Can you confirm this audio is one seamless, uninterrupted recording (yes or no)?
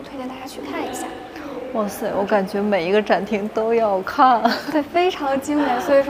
yes